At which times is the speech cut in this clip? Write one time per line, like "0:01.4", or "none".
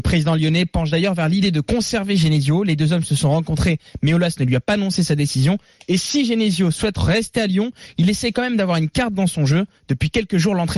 none